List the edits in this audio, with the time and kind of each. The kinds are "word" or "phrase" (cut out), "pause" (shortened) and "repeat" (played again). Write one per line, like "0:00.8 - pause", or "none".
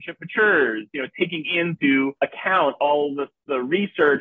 0:02.2 - pause